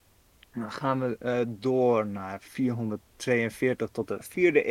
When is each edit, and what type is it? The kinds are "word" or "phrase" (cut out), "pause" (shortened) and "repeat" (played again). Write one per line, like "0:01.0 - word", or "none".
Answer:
none

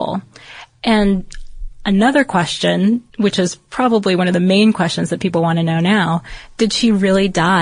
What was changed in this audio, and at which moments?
0:03.1 - pause

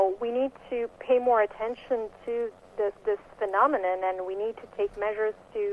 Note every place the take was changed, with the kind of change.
0:03.0 - pause

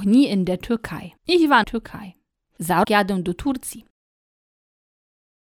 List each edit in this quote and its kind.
0:01.2 - pause
0:01.6 - phrase
0:02.8 - word

